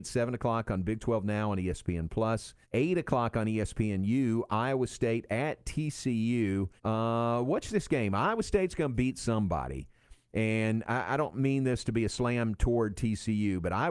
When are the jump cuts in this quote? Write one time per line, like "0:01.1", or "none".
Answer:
0:02.6
0:06.8